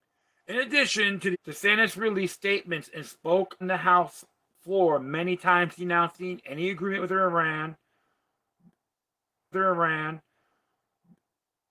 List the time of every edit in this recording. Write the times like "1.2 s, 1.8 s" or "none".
1.3 s, 3.6 s, 9.5 s